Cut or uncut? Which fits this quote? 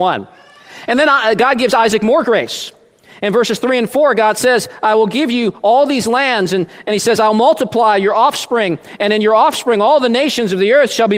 uncut